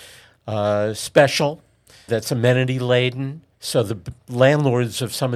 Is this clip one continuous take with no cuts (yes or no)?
no